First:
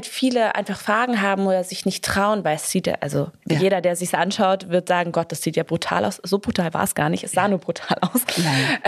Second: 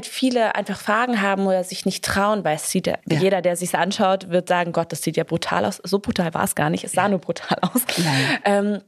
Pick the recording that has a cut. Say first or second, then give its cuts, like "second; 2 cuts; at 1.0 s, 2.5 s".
second; 1 cut; at 3.0 s